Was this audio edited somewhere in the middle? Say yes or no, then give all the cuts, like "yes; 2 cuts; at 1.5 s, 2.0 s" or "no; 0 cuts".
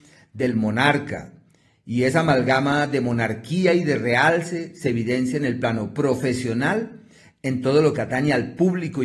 no; 0 cuts